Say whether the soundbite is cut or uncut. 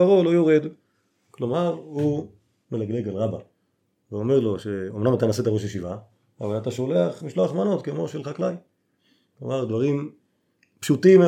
uncut